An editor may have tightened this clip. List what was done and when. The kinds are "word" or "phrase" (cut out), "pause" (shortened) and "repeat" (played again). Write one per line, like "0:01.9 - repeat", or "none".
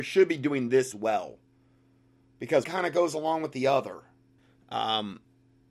0:00.9 - word
0:02.6 - word
0:04.4 - pause